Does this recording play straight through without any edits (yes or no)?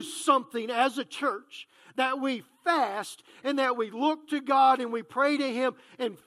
yes